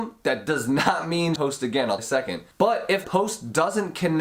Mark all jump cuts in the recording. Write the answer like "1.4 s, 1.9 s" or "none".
1.4 s, 2.0 s, 2.5 s, 3.0 s